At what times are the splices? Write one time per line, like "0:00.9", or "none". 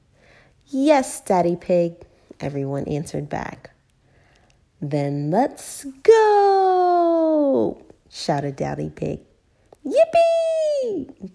none